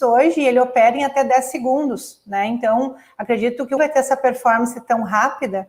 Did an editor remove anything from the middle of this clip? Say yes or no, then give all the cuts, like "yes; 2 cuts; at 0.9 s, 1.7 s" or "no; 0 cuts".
yes; 1 cut; at 3.8 s